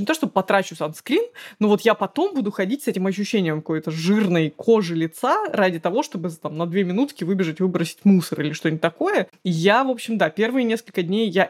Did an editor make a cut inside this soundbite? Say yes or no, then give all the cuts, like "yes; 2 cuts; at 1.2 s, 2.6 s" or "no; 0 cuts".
no; 0 cuts